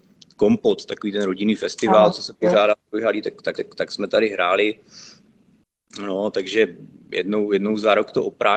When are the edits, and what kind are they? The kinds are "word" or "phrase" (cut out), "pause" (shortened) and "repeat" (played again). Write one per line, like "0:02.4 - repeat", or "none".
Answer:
0:03.5 - repeat